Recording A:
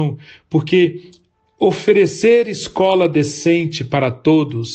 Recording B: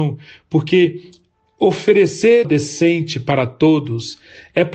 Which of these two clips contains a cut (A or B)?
B